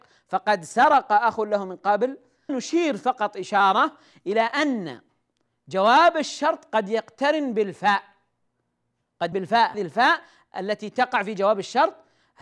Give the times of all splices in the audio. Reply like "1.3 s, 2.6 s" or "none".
2.5 s, 9.3 s, 9.7 s